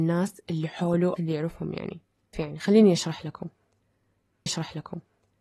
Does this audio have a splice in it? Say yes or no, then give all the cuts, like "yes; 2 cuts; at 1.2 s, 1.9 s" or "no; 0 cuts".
yes; 3 cuts; at 1.2 s, 2.3 s, 4.5 s